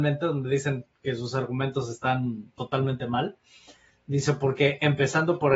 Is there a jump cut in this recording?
no; 0 cuts

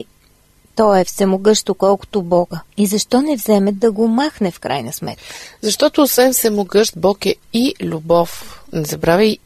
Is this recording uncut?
no; 1 cut; at 2.7 s

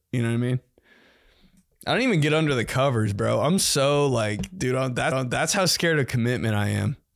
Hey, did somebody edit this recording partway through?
yes; 1 cut; at 5.1 s

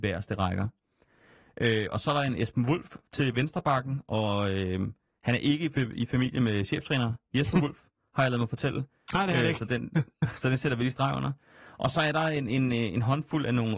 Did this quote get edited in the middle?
no; 0 cuts

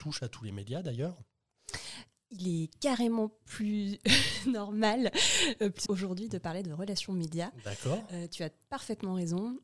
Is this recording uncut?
no; 1 cut; at 5.9 s

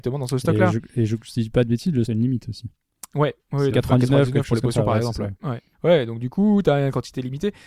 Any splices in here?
yes; 3 cuts; at 2.0 s, 3.7 s, 5.7 s

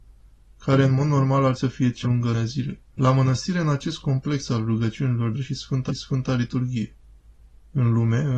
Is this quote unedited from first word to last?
no; 6 cuts; at 1.5 s, 2.0 s, 2.3 s, 2.9 s, 5.3 s, 5.9 s

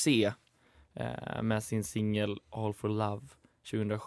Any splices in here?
yes; 1 cut; at 1.6 s

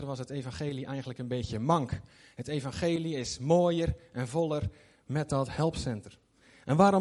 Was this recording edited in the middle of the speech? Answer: no; 0 cuts

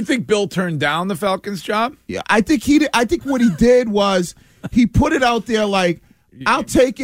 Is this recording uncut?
yes; 0 cuts

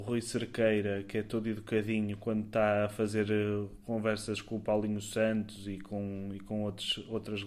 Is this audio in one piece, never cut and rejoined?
yes; 0 cuts

